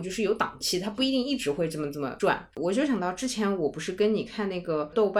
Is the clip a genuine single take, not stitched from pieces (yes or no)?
no